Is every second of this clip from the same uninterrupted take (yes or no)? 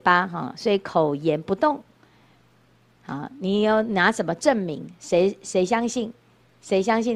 yes